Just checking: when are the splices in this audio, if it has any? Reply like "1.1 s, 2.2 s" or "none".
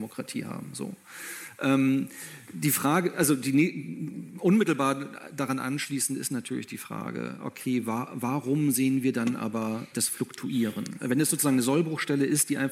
9.9 s